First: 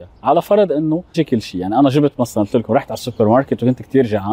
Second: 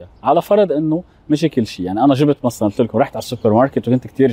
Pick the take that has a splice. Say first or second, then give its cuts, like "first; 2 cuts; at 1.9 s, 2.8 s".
first; 1 cut; at 1.1 s